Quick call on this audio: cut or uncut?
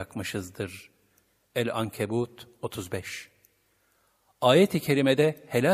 uncut